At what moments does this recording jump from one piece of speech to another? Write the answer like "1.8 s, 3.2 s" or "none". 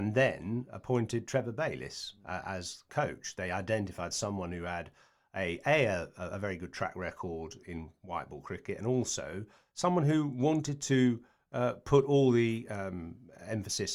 none